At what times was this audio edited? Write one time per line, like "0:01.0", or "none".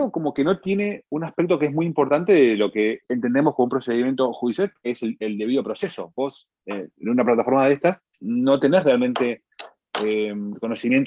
0:03.0
0:08.1

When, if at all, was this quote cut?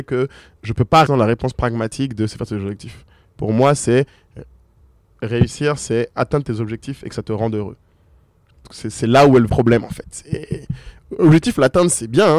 0:01.1
0:09.5

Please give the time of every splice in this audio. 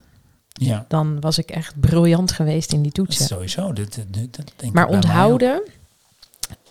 none

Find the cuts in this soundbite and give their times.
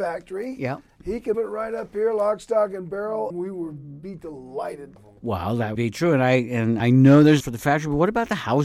0:01.3
0:03.3
0:05.0
0:05.8
0:06.8
0:07.4

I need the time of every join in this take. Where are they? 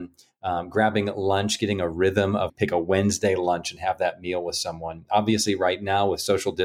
0:02.5

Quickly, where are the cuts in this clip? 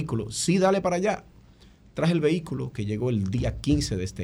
none

